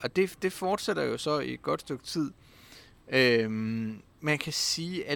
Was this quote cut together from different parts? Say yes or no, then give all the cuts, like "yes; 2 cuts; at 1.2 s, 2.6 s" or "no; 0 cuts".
yes; 1 cut; at 4.1 s